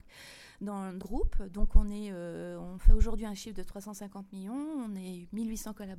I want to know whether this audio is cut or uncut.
cut